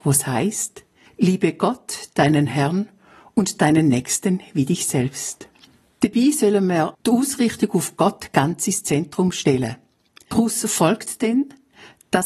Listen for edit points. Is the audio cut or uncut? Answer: uncut